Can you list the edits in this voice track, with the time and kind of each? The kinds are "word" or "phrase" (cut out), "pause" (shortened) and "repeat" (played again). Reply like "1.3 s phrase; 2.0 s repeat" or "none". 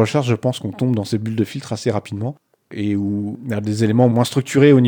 none